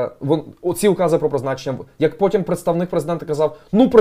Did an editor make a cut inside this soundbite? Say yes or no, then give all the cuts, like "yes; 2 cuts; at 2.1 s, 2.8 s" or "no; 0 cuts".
no; 0 cuts